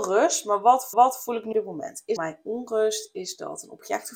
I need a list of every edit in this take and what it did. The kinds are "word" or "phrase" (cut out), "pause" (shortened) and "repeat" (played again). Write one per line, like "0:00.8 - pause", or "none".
0:00.9 - repeat
0:01.5 - word
0:02.2 - phrase

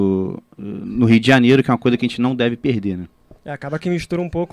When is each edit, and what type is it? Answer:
0:03.4 - pause

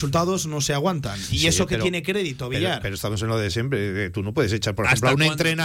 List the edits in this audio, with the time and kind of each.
none

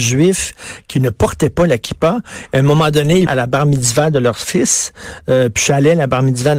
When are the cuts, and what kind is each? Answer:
0:03.3 - phrase

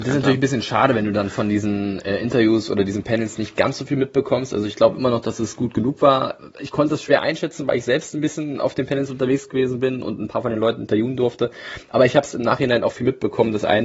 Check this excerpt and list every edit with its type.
none

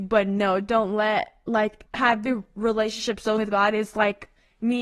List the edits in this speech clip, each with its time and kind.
0:01.9 - pause
0:03.4 - word

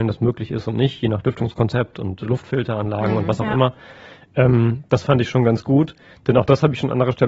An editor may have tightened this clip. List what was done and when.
none

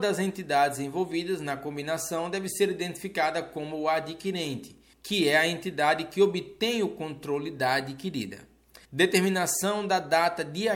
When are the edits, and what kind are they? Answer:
0:04.9 - pause
0:08.8 - pause

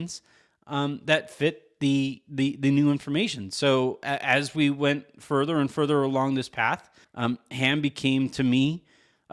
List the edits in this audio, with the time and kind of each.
0:07.0 - pause

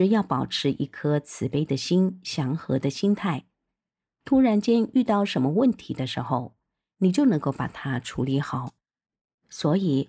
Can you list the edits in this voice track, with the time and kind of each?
none

